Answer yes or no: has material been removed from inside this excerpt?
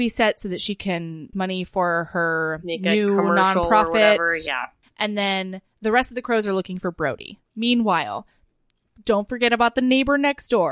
yes